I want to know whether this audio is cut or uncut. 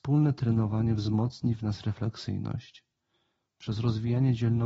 uncut